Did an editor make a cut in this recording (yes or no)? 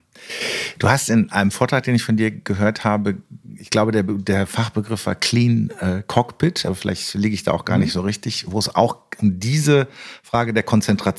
no